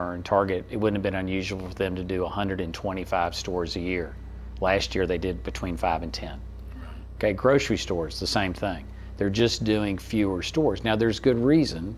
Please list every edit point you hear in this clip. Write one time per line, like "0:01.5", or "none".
none